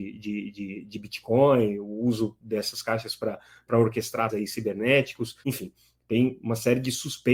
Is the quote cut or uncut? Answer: cut